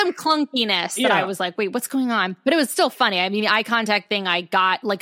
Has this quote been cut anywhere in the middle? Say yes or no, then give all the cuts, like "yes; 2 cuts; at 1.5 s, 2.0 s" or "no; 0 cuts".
no; 0 cuts